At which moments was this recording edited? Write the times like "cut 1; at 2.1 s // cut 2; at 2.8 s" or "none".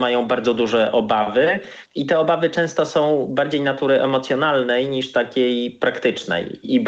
cut 1; at 1.8 s